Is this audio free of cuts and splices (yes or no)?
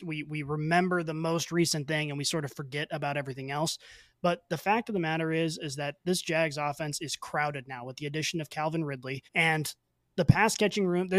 no